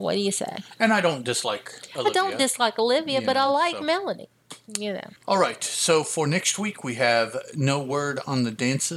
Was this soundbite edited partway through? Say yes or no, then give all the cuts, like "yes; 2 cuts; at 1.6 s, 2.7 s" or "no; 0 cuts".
no; 0 cuts